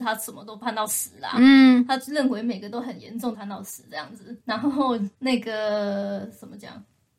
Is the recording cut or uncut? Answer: cut